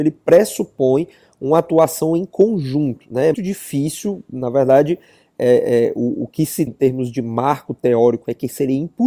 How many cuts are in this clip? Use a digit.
2